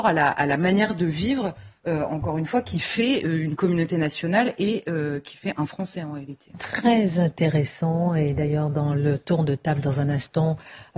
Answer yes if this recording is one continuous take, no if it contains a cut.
yes